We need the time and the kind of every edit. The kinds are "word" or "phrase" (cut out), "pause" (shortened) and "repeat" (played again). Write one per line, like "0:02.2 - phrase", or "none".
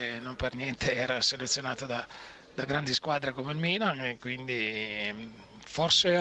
none